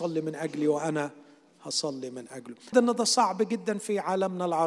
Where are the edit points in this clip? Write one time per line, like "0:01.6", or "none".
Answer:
0:02.7